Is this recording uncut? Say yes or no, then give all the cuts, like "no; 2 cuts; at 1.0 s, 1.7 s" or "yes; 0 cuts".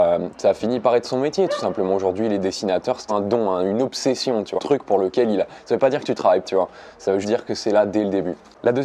no; 4 cuts; at 3.1 s, 4.6 s, 6.4 s, 7.2 s